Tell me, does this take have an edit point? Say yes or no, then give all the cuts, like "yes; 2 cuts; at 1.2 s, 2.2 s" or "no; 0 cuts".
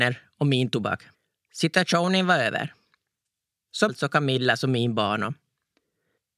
yes; 2 cuts; at 1.1 s, 3.9 s